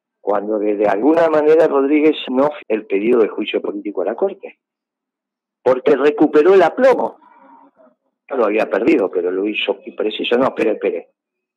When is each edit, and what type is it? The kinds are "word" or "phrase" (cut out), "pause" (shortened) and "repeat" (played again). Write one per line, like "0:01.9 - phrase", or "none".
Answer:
0:02.2 - word
0:02.6 - word
0:08.3 - word
0:09.8 - word